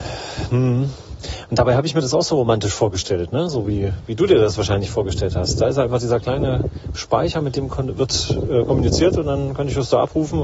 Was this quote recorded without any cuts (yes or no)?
yes